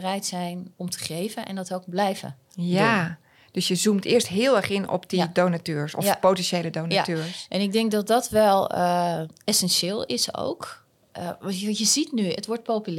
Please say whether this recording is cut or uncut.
uncut